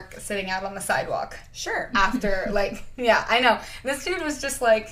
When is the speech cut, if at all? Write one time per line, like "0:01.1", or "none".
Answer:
none